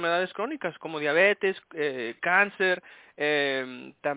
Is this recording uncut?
yes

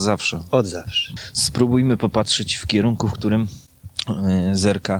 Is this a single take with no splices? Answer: yes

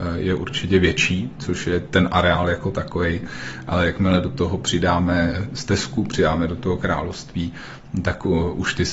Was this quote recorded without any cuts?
yes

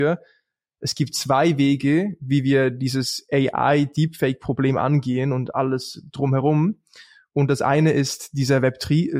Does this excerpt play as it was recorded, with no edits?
yes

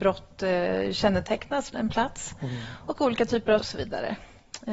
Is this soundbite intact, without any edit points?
no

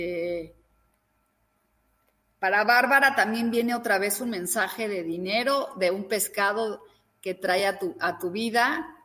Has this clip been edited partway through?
no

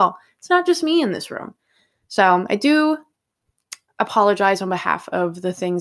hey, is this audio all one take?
yes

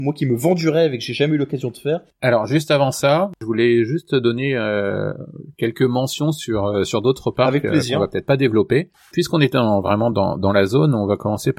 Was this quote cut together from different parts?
no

